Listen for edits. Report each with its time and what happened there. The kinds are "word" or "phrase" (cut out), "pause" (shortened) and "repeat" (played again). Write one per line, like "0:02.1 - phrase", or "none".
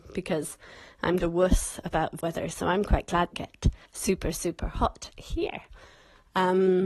0:01.2 - word
0:02.2 - phrase
0:03.3 - phrase
0:03.9 - pause